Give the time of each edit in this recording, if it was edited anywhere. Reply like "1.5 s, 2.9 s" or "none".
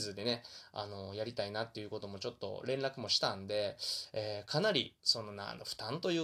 5.0 s